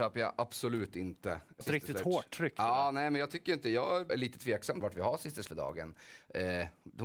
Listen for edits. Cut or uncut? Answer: cut